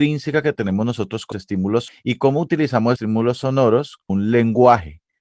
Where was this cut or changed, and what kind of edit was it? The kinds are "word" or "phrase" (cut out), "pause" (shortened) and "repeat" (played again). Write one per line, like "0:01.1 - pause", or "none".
0:01.3 - word
0:01.9 - word
0:03.0 - word
0:04.1 - word